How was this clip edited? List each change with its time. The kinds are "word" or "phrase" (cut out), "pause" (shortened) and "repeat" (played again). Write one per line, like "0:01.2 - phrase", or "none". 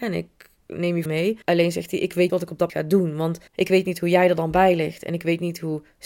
0:01.1 - word
0:01.4 - pause
0:02.3 - word
0:02.7 - word
0:03.5 - pause